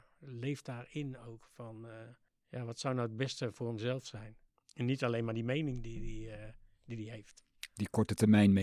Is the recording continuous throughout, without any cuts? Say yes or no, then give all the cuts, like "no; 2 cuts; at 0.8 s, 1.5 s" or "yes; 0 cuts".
no; 2 cuts; at 2.3 s, 4.5 s